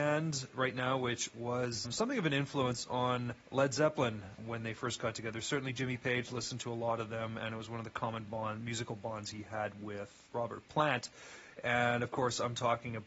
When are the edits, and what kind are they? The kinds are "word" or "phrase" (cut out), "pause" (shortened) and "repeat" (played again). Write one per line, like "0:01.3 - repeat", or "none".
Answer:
0:01.8 - word
0:03.4 - pause
0:04.4 - word
0:10.3 - word